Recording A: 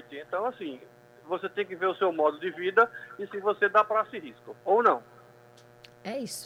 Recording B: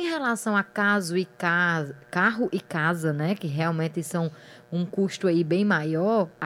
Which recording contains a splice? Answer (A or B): A